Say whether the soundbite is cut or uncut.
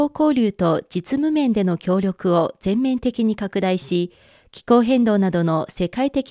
uncut